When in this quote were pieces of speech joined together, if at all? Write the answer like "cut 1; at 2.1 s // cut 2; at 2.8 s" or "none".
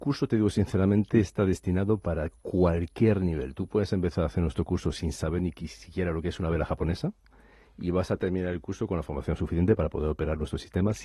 none